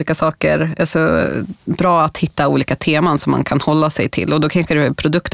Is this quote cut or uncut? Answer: uncut